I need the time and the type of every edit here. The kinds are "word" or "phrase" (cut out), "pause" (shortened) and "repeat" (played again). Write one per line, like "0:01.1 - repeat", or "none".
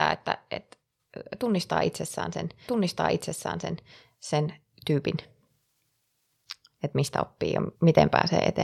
0:02.7 - repeat
0:07.7 - pause